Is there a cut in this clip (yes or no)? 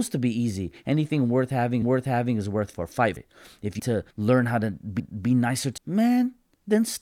yes